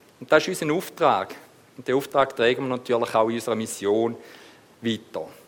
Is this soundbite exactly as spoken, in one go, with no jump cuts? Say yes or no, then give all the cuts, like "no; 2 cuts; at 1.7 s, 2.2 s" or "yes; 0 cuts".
yes; 0 cuts